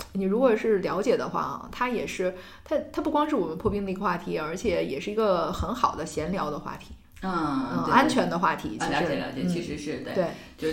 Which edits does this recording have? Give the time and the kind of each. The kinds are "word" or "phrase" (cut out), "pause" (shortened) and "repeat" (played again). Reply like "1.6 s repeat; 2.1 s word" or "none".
none